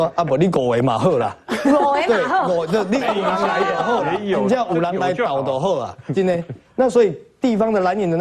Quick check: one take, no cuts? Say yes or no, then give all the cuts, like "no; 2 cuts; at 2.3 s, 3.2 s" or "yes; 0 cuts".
yes; 0 cuts